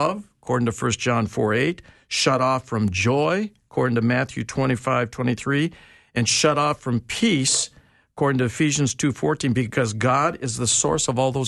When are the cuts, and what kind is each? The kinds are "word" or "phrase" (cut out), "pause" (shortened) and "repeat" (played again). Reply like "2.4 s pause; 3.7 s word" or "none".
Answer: none